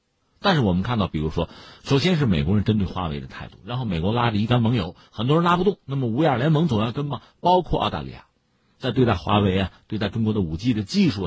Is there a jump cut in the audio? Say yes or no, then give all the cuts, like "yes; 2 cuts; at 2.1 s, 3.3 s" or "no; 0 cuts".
no; 0 cuts